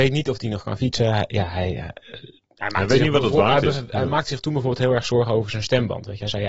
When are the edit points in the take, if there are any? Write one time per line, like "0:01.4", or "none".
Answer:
none